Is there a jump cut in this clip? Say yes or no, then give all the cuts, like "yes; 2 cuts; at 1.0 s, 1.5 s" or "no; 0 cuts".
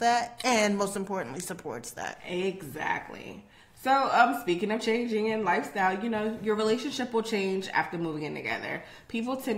no; 0 cuts